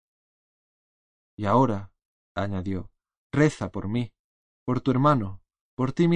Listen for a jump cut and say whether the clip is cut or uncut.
uncut